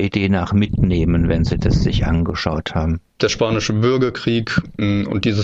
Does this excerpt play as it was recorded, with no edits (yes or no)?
yes